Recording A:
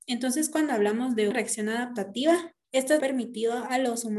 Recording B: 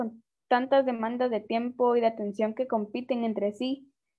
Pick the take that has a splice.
A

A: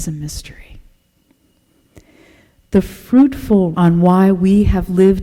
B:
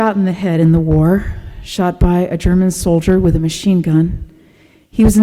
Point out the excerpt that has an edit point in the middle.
A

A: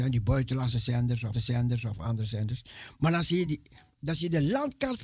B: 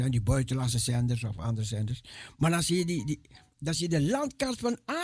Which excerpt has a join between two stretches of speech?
A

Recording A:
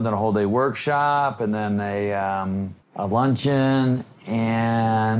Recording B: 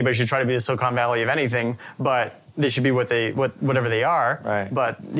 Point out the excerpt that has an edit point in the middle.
A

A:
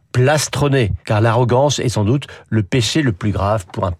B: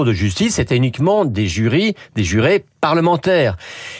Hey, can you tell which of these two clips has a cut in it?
A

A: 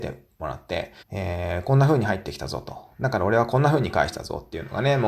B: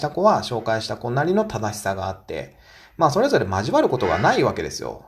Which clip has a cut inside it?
A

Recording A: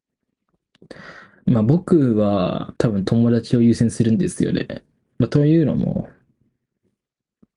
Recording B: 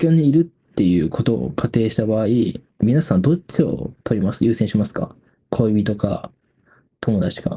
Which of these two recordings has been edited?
A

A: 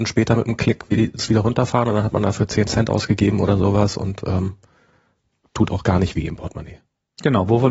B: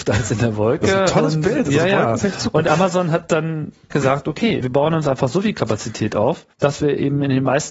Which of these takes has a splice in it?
B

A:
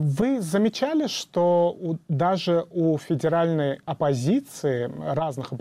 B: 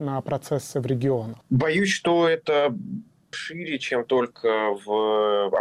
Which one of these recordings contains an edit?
B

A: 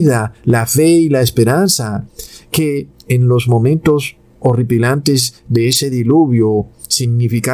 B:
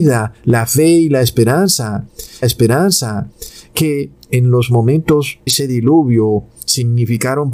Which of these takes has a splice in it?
B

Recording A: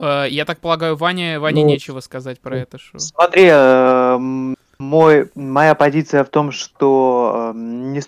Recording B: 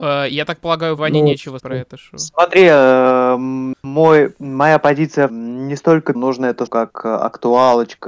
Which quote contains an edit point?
B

